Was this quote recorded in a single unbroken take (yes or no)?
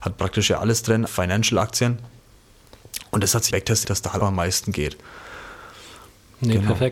no